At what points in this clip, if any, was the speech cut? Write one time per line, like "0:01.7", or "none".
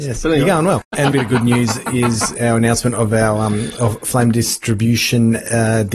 0:01.1